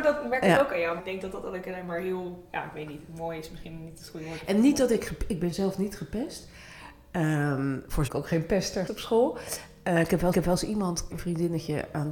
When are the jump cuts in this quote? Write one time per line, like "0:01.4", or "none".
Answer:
0:01.0
0:02.5
0:08.1
0:08.9
0:10.3
0:11.1